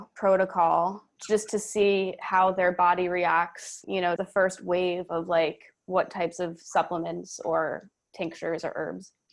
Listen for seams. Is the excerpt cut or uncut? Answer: cut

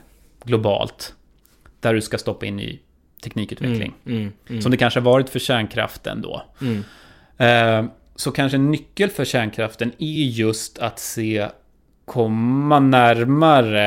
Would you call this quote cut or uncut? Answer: uncut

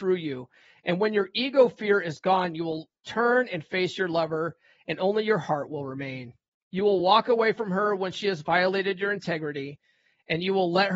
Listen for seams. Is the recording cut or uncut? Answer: uncut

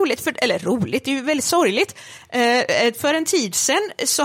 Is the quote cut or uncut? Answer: uncut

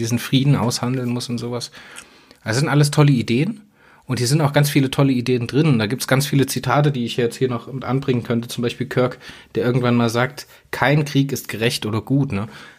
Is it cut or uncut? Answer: uncut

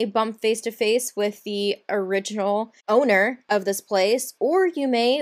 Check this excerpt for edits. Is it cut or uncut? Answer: uncut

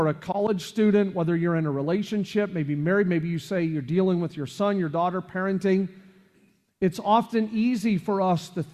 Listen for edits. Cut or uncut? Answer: uncut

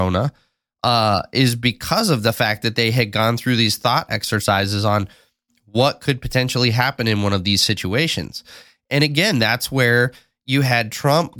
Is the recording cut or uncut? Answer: uncut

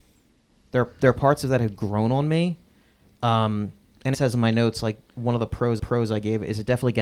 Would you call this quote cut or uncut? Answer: cut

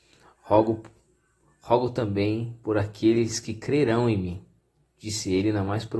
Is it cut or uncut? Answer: uncut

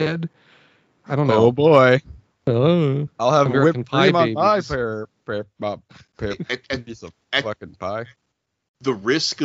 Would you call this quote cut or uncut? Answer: cut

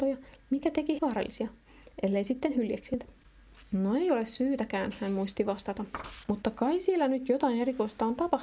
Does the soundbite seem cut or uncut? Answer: cut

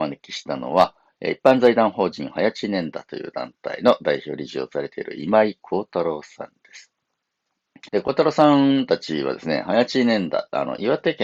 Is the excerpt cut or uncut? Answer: cut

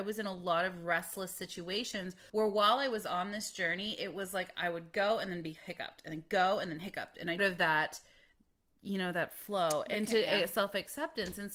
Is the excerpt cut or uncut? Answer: cut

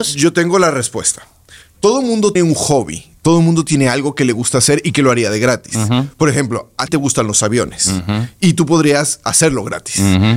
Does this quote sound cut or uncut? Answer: cut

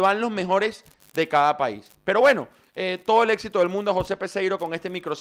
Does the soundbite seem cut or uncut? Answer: uncut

